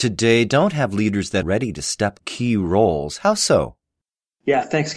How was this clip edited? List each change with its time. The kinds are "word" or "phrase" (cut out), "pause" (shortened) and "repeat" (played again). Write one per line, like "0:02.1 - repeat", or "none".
0:01.4 - word
0:02.2 - phrase